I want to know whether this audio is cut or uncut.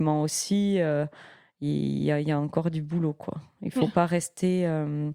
uncut